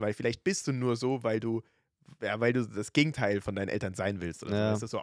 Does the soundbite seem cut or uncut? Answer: cut